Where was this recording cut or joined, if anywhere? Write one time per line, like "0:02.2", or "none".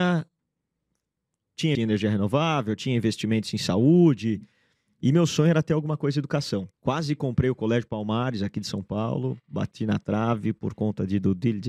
0:01.7
0:06.7